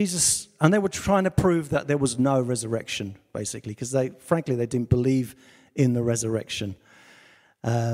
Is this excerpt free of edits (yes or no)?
yes